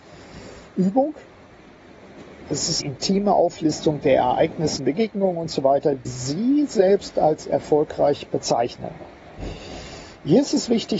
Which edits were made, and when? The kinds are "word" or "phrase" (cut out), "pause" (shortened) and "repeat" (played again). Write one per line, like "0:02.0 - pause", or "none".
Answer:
0:02.8 - word
0:04.8 - word
0:06.0 - word